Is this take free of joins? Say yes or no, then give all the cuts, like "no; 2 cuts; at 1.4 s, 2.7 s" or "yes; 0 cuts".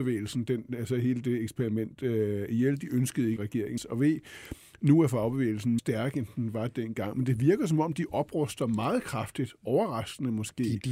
no; 3 cuts; at 3.4 s, 3.8 s, 5.8 s